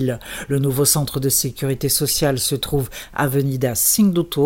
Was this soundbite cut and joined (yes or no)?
no